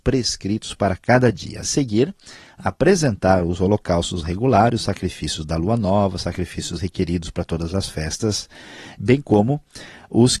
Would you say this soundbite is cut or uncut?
uncut